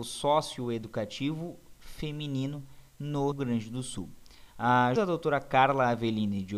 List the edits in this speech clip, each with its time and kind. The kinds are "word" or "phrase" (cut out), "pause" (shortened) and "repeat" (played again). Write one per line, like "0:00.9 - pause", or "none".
0:03.3 - word
0:05.0 - word

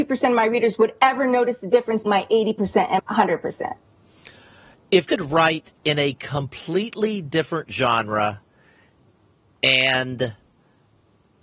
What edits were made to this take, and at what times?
0:02.1 - word
0:03.0 - word
0:05.0 - word

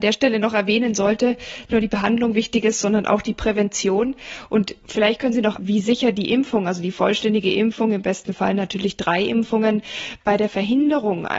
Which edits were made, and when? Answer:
0:01.7 - phrase
0:05.6 - phrase

